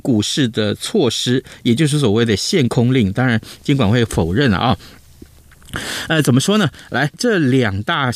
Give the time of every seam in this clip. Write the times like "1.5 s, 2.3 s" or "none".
7.1 s